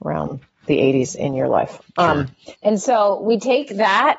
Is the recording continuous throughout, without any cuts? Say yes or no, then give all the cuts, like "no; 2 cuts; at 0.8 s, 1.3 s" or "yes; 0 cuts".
no; 1 cut; at 2.5 s